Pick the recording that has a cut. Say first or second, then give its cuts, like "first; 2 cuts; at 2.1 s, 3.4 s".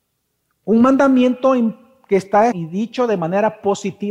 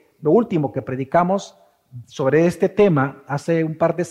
first; 1 cut; at 2.5 s